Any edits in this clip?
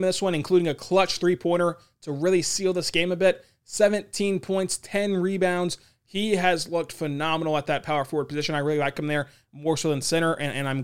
no; 0 cuts

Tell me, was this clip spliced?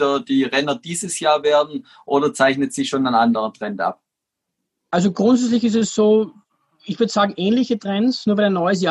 no; 0 cuts

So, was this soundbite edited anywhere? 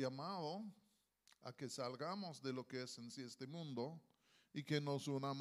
no; 0 cuts

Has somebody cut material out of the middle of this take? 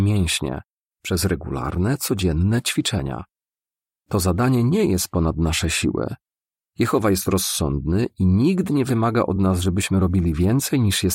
no; 0 cuts

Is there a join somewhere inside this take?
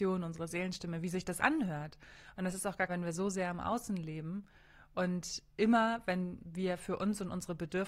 yes; 2 cuts; at 1.4 s, 2.9 s

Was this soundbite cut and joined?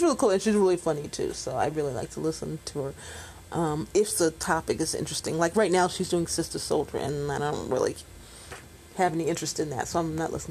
no; 0 cuts

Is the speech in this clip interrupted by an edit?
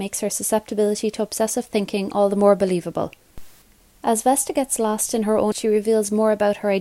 yes; 1 cut; at 5.5 s

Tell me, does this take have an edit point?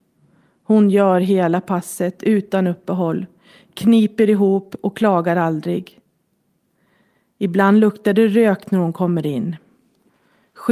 no; 0 cuts

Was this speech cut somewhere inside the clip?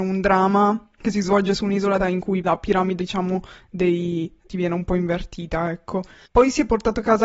yes; 4 cuts; at 2.0 s, 2.4 s, 3.0 s, 4.5 s

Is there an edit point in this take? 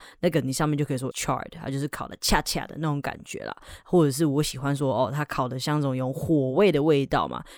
yes; 1 cut; at 1.1 s

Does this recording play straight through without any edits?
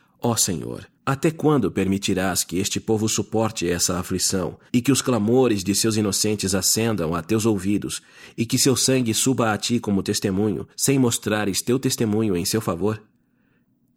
no; 3 cuts; at 0.9 s, 4.7 s, 10.7 s

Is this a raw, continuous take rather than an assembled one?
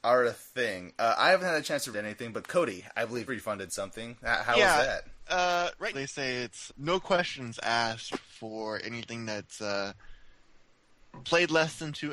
no; 4 cuts; at 1.9 s, 3.3 s, 5.9 s, 6.7 s

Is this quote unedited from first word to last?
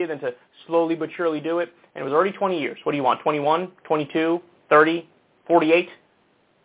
yes; 0 cuts

